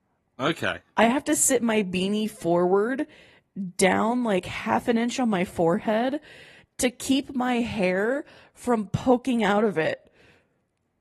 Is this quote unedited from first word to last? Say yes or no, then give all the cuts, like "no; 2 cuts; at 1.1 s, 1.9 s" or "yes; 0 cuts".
yes; 0 cuts